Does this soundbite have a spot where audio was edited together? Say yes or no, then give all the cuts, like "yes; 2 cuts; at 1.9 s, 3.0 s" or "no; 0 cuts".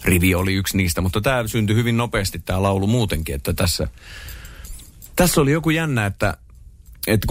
no; 0 cuts